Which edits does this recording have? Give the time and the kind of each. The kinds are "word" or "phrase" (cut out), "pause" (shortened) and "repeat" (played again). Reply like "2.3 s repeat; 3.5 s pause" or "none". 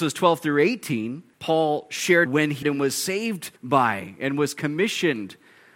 1.3 s pause; 2.3 s word; 2.6 s word; 3.6 s pause